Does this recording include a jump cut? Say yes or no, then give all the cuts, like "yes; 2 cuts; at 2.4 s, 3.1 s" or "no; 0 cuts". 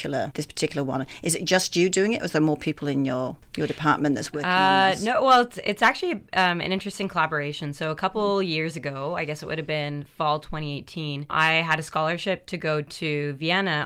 no; 0 cuts